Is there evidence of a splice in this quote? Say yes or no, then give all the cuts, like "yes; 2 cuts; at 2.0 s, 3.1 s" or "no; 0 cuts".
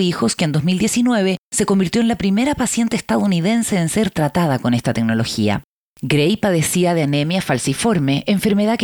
no; 0 cuts